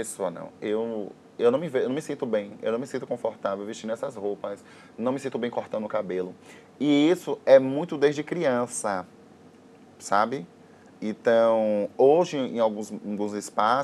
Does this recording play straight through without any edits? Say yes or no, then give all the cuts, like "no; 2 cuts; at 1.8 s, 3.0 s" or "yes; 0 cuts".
yes; 0 cuts